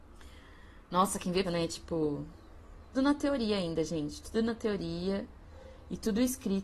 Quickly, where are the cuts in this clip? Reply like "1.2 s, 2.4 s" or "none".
1.4 s, 2.9 s